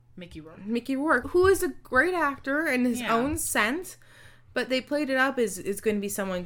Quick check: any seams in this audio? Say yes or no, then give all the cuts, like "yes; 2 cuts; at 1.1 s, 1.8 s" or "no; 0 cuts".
yes; 1 cut; at 1.2 s